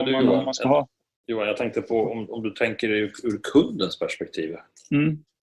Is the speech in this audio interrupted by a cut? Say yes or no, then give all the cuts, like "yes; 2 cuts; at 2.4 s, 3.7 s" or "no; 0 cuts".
no; 0 cuts